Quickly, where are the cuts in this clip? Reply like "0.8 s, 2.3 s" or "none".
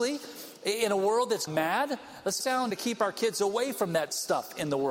1.5 s, 2.4 s, 2.7 s

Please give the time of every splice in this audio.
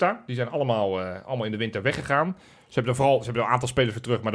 none

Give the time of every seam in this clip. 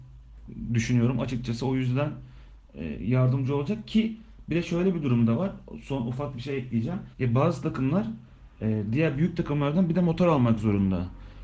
7.1 s

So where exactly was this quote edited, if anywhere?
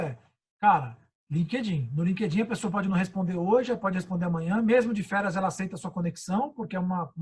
none

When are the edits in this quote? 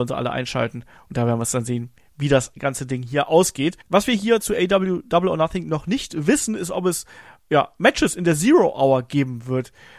3.8 s

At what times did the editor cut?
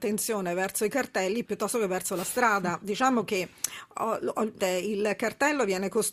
1.4 s, 4.6 s

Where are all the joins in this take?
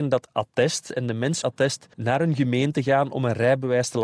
1.4 s, 1.9 s

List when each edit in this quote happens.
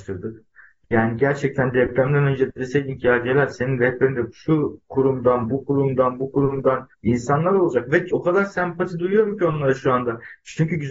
6.9 s

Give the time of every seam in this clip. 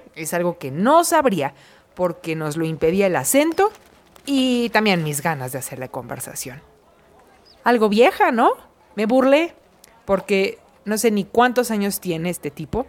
none

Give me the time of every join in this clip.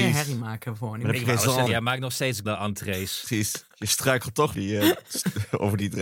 1.7 s, 2.5 s, 4.5 s

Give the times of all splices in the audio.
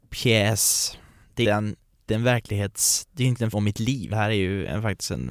1.4 s, 2.1 s, 3.5 s, 4.1 s

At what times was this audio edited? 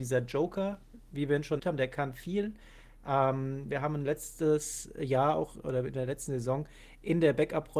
1.6 s

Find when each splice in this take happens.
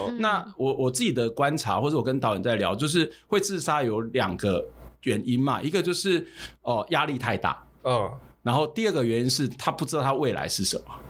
none

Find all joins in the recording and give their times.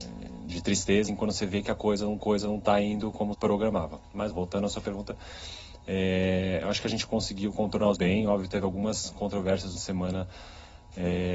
1.1 s, 2.2 s, 3.3 s, 4.3 s, 8.0 s, 9.7 s

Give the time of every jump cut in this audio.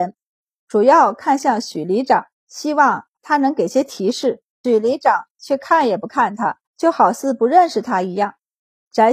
2.3 s, 6.7 s

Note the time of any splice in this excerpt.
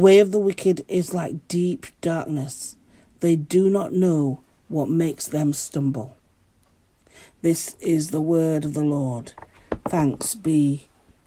none

